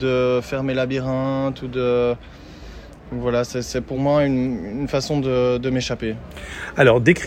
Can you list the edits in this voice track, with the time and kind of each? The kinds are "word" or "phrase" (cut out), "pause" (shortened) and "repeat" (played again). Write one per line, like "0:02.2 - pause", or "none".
none